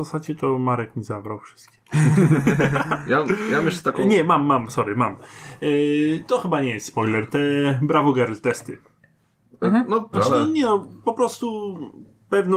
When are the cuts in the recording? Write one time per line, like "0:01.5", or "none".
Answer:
0:10.1